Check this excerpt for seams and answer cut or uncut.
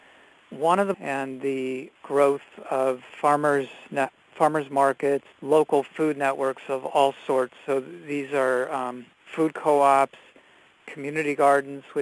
cut